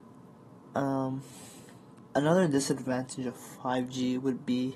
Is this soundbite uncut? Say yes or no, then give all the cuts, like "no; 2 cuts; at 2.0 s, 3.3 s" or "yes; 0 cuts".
yes; 0 cuts